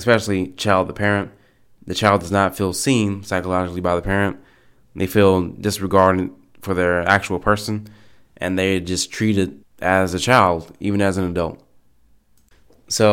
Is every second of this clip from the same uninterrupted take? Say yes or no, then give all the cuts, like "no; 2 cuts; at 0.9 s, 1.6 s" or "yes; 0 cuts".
no; 1 cut; at 9.6 s